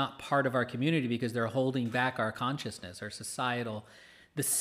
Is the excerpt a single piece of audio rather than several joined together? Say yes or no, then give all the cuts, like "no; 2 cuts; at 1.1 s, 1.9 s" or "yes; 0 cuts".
yes; 0 cuts